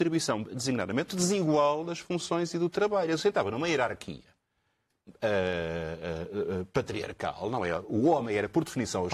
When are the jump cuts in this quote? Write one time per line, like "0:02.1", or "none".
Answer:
0:01.1